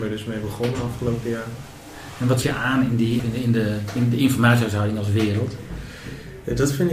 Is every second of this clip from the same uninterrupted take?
no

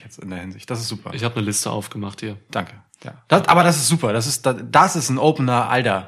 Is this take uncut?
yes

